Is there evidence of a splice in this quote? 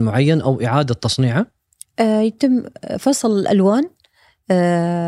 no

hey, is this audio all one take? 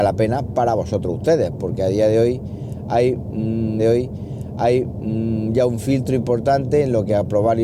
no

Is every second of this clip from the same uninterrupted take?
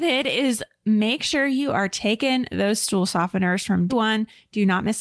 no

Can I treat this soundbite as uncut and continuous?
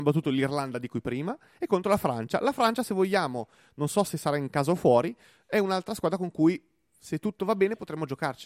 yes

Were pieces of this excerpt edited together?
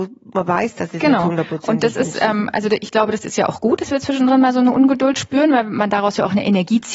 no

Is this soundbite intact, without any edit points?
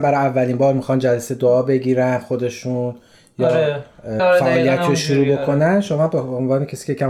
no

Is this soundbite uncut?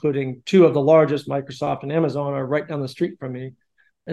yes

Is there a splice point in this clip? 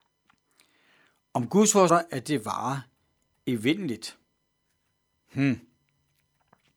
yes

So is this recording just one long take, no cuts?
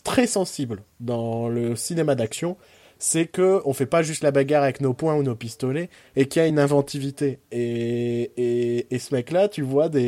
yes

